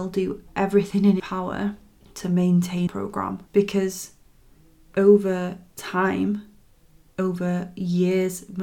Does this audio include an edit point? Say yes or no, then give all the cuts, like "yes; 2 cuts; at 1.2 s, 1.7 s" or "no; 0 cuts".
yes; 4 cuts; at 1.2 s, 2.0 s, 2.9 s, 3.5 s